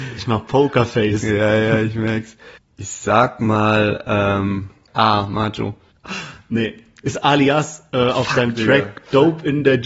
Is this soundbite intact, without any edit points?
yes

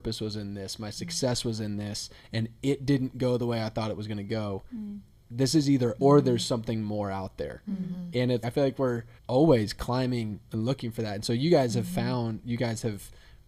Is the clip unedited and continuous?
no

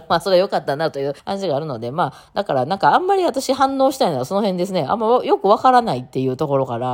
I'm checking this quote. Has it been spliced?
yes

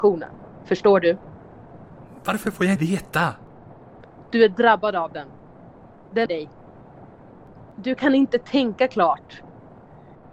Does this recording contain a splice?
yes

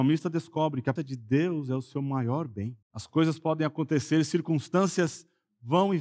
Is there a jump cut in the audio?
yes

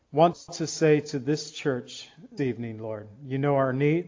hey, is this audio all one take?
no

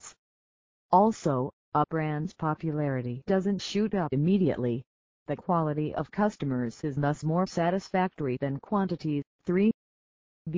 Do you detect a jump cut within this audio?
yes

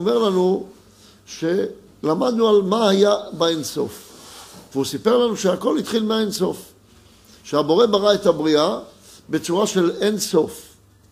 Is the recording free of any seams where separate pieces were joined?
yes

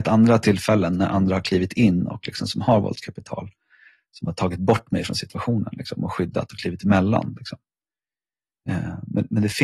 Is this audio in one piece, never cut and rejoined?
yes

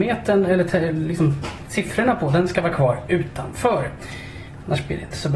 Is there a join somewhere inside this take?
no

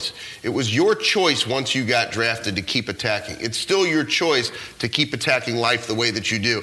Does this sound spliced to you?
no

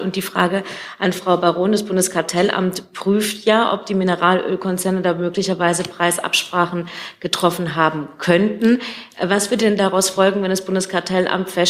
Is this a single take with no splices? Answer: yes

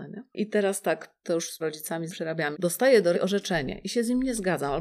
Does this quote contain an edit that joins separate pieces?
yes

